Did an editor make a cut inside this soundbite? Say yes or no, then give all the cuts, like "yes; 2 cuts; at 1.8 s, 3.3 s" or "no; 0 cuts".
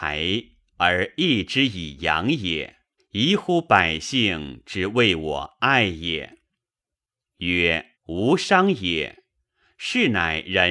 yes; 2 cuts; at 3.0 s, 8.0 s